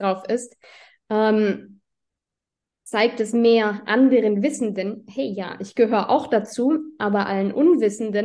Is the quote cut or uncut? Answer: uncut